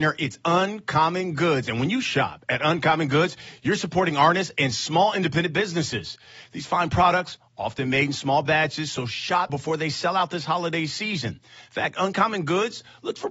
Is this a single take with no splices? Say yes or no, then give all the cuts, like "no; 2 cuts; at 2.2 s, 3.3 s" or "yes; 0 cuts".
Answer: no; 1 cut; at 9.5 s